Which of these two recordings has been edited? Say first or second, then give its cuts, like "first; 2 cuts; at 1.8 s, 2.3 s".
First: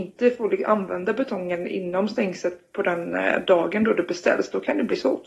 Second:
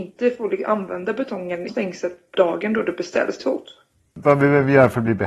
second; 3 cuts; at 1.7 s, 2.3 s, 3.4 s